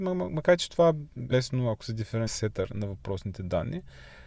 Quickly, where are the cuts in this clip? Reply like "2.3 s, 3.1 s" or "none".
1.3 s, 2.3 s, 2.7 s